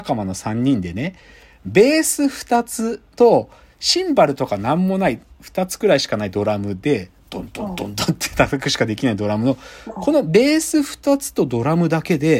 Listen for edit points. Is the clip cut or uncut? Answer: uncut